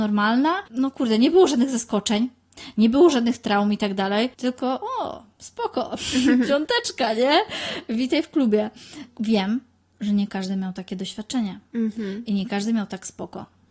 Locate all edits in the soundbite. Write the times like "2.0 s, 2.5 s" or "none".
4.3 s